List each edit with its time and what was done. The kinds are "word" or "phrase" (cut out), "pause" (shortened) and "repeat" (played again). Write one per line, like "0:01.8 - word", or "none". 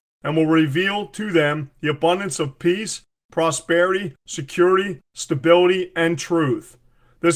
none